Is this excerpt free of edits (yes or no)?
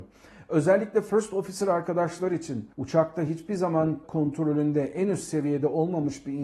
no